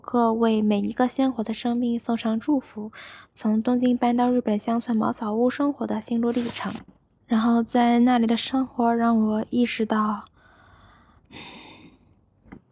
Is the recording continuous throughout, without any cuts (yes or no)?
yes